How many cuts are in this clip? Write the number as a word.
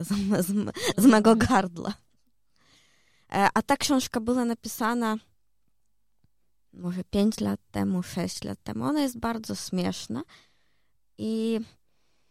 zero